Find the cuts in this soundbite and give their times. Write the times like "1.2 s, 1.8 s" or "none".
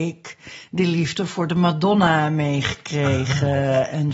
none